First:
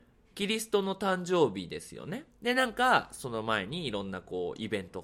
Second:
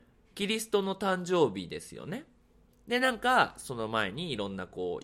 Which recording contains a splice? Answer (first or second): first